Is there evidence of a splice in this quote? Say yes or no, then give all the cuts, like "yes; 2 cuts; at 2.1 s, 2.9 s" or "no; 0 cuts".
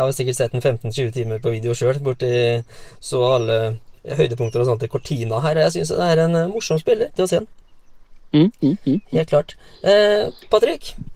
yes; 2 cuts; at 4.0 s, 7.2 s